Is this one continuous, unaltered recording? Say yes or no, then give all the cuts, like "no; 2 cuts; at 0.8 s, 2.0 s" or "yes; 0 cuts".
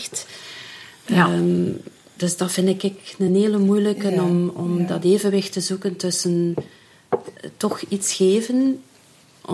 yes; 0 cuts